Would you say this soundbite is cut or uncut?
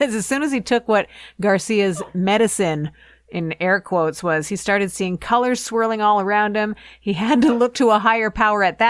uncut